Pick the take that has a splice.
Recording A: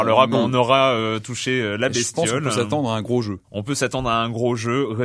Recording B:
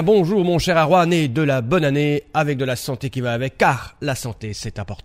A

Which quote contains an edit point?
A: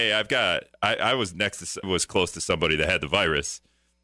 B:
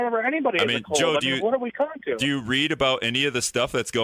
A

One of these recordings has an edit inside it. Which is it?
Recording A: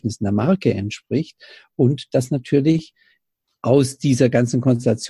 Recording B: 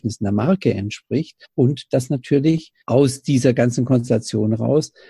B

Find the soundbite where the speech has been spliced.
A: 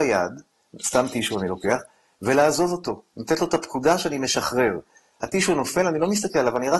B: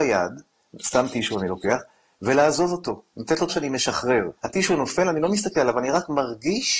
B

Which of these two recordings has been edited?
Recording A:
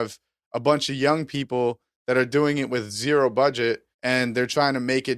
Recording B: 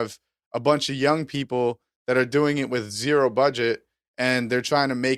A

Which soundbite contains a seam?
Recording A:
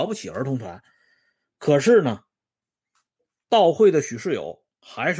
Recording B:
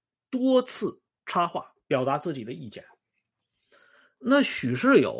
B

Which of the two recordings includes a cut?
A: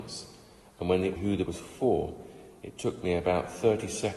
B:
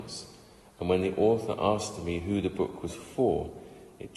A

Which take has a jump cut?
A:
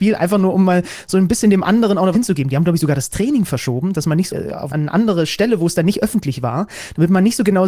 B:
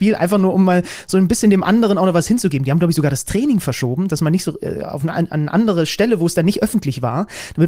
A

